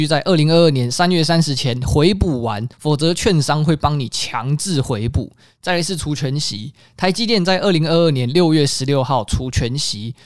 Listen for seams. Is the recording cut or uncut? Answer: cut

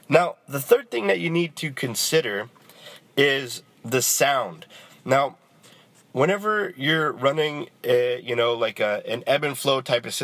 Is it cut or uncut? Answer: uncut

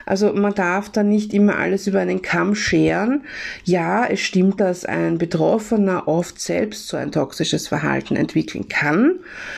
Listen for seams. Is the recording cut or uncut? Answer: cut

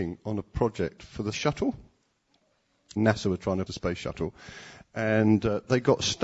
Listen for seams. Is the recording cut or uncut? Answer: cut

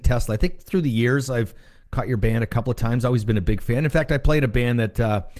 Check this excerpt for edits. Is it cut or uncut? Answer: uncut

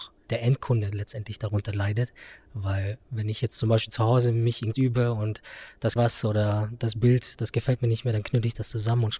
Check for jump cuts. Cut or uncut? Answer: cut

